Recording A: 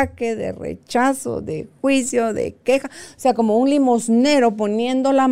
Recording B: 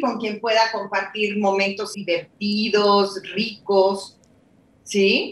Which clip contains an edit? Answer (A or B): B